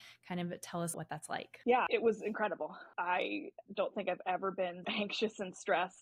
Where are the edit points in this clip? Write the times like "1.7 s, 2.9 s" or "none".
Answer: 0.9 s, 4.8 s